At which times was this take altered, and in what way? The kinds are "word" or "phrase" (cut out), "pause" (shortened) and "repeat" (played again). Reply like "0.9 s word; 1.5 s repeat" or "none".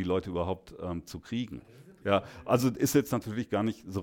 none

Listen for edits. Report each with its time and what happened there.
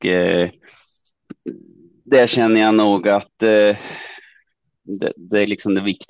none

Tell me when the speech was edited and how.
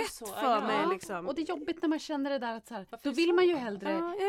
2.9 s pause

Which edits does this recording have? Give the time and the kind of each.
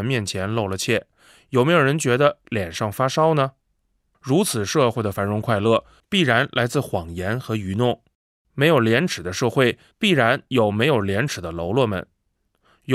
none

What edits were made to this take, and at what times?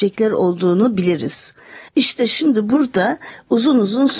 1.9 s pause

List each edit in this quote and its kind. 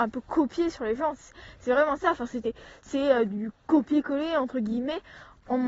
none

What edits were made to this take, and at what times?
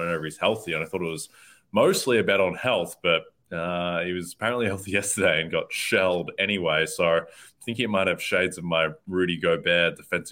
none

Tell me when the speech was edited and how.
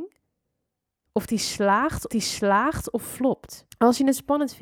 2.1 s repeat; 3.7 s pause

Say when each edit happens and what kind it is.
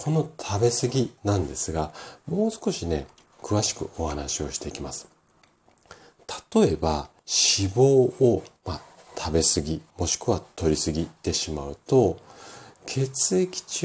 1.2 s pause; 7.2 s pause; 8.6 s pause; 9.9 s pause

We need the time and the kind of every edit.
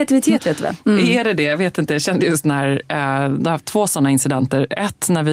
none

